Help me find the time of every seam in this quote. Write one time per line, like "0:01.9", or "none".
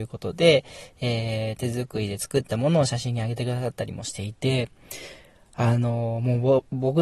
none